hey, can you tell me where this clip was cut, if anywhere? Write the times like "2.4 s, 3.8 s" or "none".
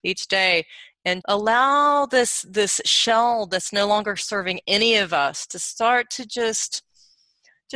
1.2 s